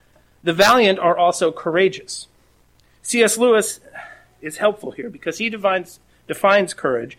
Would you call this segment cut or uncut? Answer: uncut